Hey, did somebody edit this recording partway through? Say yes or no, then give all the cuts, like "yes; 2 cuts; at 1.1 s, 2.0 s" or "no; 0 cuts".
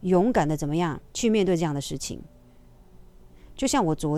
yes; 1 cut; at 1.1 s